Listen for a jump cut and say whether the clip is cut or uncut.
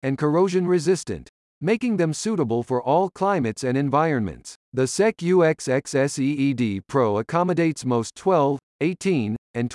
cut